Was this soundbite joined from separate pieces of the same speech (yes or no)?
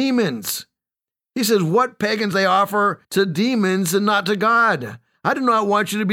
yes